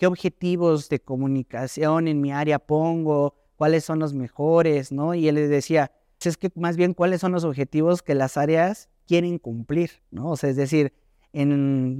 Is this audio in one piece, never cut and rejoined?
no; 2 cuts; at 6.2 s, 10.0 s

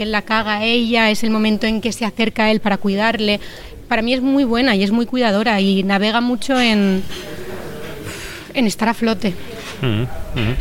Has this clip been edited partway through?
no; 0 cuts

